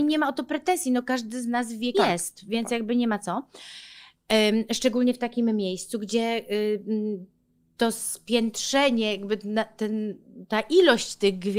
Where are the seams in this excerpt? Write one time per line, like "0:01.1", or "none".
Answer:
0:01.9